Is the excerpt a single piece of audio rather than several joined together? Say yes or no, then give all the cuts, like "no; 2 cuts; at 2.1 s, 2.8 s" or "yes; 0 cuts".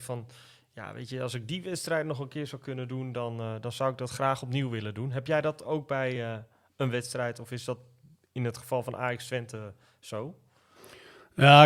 yes; 0 cuts